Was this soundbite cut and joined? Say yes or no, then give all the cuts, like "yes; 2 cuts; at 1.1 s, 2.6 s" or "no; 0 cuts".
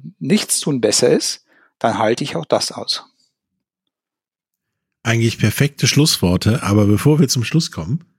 no; 0 cuts